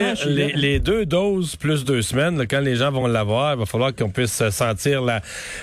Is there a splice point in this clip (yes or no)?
no